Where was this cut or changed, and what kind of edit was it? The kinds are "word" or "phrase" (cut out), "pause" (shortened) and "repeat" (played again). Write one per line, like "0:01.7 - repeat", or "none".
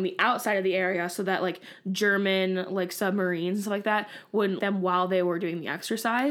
0:04.6 - word